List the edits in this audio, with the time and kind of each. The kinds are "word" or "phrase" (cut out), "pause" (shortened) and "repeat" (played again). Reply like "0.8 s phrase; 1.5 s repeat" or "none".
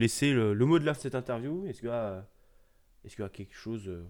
0.9 s word; 1.8 s word; 3.2 s word

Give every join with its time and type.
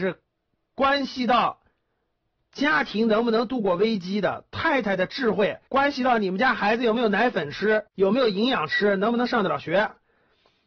5.7 s pause; 7.9 s pause

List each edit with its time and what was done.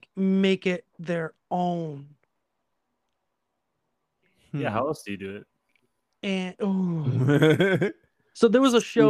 none

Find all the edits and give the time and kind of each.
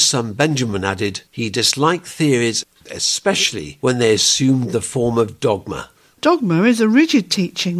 1.3 s pause; 5.9 s pause

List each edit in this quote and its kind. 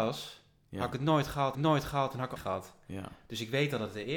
1.5 s repeat; 2.4 s phrase

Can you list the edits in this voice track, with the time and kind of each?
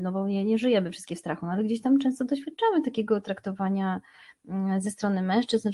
none

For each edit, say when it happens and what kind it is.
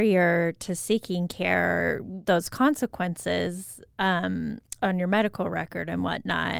2.2 s word

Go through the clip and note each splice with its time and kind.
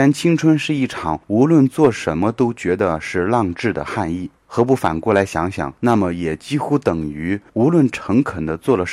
1.2 s pause; 4.4 s pause; 5.8 s pause; 7.5 s pause

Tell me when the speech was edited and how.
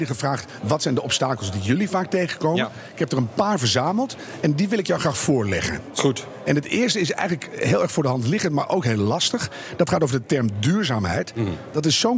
none

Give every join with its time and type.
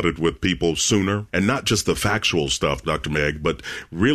none

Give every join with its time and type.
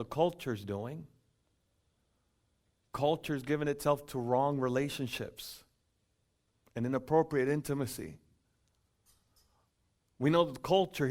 none

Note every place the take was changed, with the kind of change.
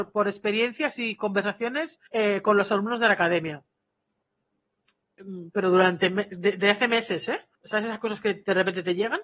2.1 s pause; 7.5 s pause

